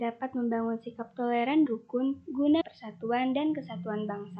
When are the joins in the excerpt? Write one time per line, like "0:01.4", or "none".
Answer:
0:01.7
0:02.6